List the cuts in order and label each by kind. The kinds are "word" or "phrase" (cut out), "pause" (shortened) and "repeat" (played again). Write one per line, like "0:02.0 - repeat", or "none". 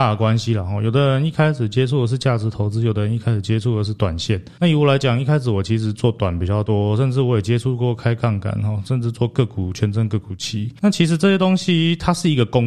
0:10.8 - pause

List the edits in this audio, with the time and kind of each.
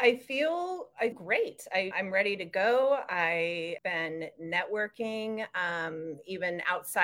0:01.1 - word
0:01.9 - word
0:03.8 - word

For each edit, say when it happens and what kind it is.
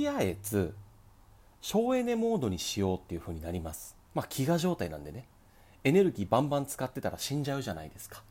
0:04.0 - pause

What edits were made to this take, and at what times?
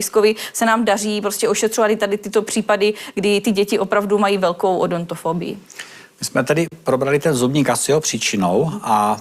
none

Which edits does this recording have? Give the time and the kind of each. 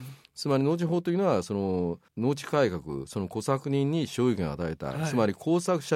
0:02.1 - pause

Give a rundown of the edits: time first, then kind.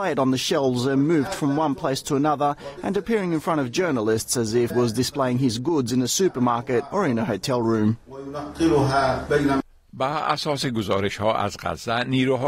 0:04.7 - word

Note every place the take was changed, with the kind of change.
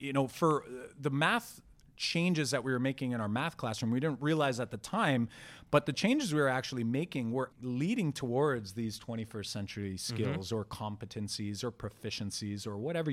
0:07.5 - word

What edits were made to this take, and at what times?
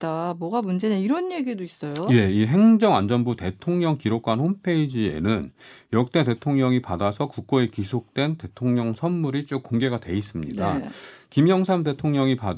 none

